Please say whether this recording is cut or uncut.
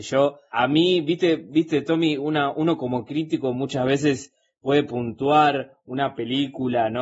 uncut